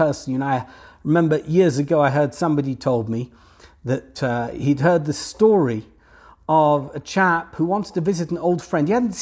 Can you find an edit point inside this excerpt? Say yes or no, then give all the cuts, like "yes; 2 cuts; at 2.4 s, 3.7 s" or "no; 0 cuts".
no; 0 cuts